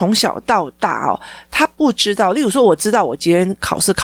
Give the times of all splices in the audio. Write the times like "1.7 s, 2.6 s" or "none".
none